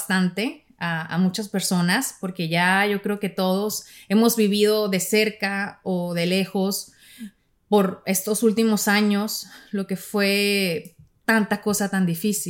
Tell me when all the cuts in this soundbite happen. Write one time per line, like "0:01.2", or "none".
0:07.5